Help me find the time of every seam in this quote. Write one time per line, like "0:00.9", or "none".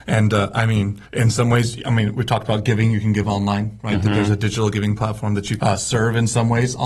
0:01.0
0:05.6